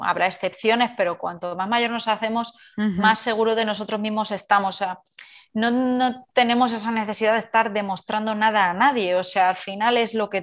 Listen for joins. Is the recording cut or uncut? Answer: uncut